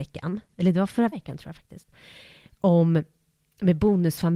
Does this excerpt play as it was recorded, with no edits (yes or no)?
no